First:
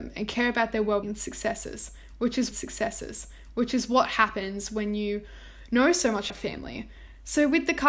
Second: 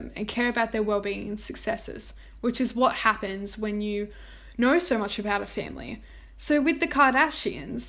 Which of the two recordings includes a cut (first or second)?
first